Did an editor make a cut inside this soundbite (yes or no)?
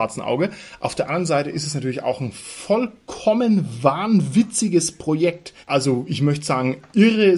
yes